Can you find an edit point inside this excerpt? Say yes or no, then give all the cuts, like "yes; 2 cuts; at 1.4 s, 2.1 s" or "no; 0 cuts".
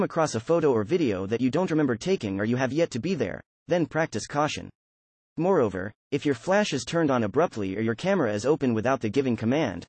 no; 0 cuts